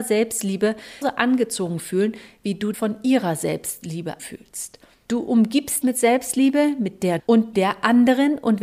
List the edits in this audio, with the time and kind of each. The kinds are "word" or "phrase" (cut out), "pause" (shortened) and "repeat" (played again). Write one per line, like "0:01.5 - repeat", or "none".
0:01.0 - word
0:02.7 - word
0:04.2 - word
0:05.8 - word
0:07.2 - word
0:07.5 - word